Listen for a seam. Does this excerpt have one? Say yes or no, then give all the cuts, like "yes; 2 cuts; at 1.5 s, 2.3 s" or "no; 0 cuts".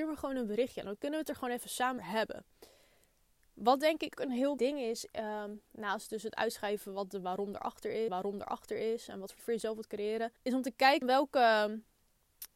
yes; 8 cuts; at 2.0 s, 4.2 s, 4.6 s, 5.7 s, 8.1 s, 9.4 s, 10.4 s, 11.0 s